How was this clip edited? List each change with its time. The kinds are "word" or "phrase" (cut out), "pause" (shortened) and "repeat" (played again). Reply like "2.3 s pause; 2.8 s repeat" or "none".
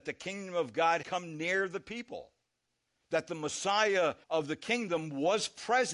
1.0 s word; 4.2 s pause